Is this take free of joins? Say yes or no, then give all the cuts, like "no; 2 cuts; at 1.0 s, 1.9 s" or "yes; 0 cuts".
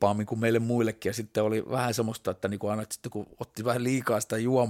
yes; 0 cuts